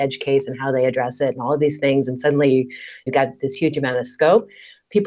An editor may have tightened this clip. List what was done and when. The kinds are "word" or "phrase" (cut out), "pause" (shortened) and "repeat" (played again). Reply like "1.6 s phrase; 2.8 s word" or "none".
3.1 s word